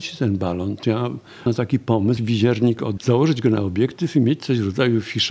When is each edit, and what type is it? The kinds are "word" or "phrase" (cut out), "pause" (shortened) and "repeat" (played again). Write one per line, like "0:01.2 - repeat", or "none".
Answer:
0:01.5 - word
0:02.2 - phrase
0:03.0 - word